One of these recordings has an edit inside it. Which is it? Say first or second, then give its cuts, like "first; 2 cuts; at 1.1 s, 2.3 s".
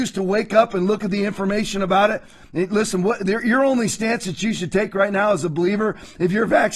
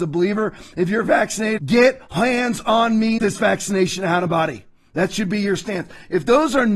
second; 3 cuts; at 1.6 s, 3.2 s, 4.3 s